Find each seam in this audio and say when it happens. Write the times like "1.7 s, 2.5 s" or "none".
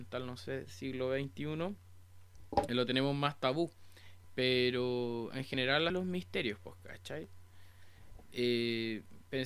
5.9 s